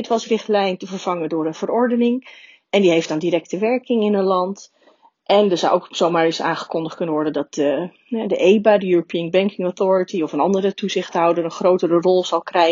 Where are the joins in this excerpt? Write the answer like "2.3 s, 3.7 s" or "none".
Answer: none